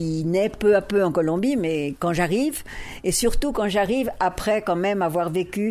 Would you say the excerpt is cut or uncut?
uncut